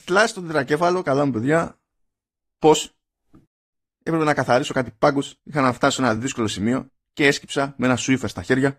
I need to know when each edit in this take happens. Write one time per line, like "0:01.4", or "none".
none